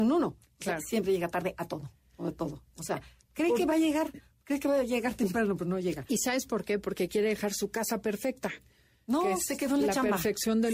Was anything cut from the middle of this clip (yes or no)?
no